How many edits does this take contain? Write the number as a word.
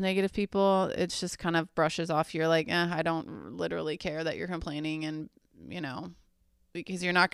zero